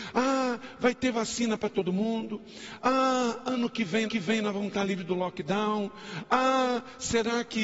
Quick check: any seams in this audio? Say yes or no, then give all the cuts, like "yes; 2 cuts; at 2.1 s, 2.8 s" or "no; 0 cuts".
yes; 1 cut; at 4.1 s